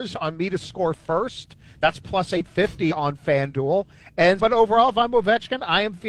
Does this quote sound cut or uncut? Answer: cut